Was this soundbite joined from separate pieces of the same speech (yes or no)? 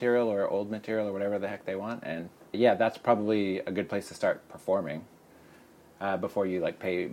no